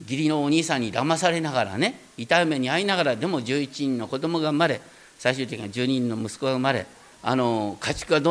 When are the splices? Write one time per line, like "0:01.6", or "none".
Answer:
0:07.1

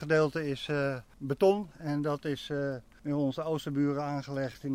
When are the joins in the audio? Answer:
0:01.7

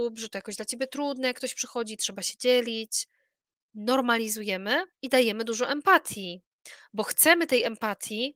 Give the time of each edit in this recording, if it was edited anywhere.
0:04.9

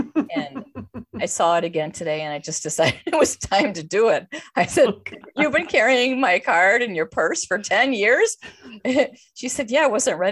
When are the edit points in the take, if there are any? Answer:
none

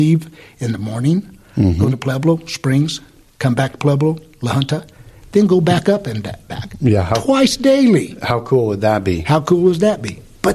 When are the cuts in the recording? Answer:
none

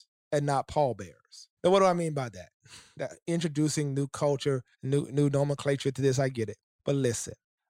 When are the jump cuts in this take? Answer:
0:01.6
0:04.7

